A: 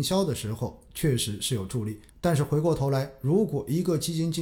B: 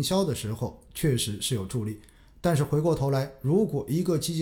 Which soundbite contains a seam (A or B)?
A